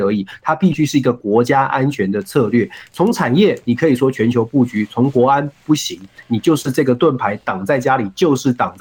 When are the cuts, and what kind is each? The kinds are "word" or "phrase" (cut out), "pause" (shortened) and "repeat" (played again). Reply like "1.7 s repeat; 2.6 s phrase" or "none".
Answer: none